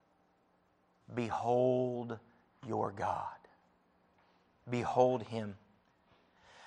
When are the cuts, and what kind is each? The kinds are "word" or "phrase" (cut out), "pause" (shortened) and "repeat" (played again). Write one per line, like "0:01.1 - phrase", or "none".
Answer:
none